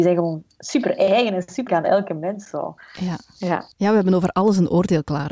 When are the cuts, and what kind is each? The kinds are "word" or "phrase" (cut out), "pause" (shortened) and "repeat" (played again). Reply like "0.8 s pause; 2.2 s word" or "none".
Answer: 1.7 s word; 3.7 s pause